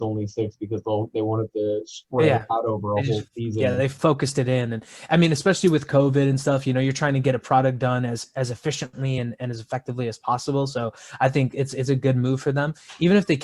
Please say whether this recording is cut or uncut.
uncut